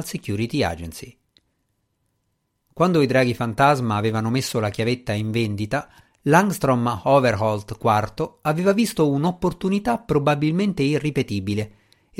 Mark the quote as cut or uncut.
uncut